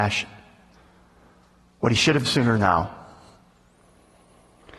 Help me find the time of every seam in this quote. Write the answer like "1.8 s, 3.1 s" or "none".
2.2 s, 2.5 s